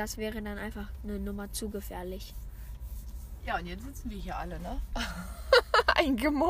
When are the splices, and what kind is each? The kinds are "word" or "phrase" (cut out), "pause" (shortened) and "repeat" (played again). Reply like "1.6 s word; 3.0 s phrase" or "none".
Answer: none